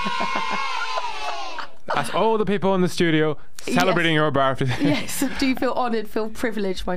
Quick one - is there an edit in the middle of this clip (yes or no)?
no